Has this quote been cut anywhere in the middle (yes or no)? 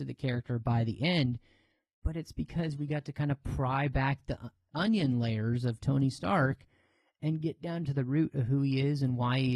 no